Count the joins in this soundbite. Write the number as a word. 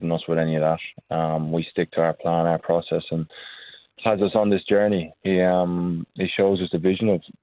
zero